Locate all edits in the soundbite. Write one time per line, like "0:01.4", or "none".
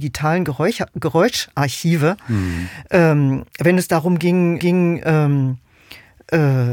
0:04.6